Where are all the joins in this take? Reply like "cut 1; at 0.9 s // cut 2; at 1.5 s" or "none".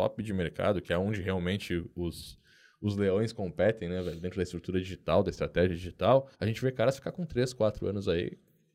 cut 1; at 6.3 s

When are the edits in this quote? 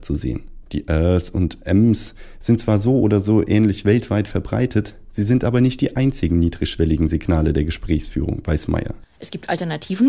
none

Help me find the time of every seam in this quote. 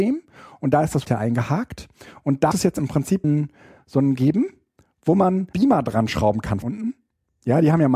cut 1; at 1.0 s // cut 2; at 2.5 s // cut 3; at 3.2 s // cut 4; at 4.1 s // cut 5; at 5.5 s // cut 6; at 6.6 s

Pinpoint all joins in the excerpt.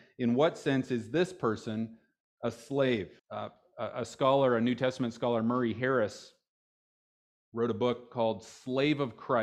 cut 1; at 3.2 s

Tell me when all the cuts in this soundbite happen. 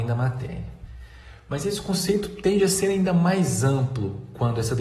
none

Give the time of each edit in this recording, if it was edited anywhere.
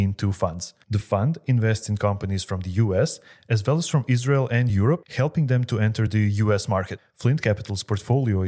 none

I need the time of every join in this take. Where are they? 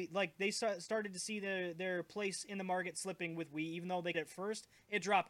cut 1; at 4.1 s

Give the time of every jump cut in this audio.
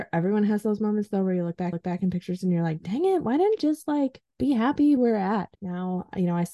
cut 1; at 1.7 s // cut 2; at 3.6 s // cut 3; at 4.3 s // cut 4; at 5.0 s // cut 5; at 5.5 s

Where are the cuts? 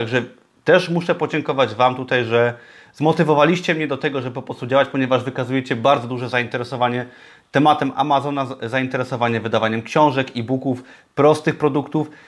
none

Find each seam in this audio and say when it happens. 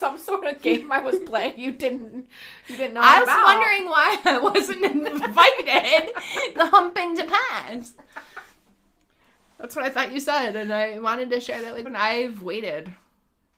cut 1; at 1.6 s // cut 2; at 3.2 s // cut 3; at 6.5 s // cut 4; at 11.8 s

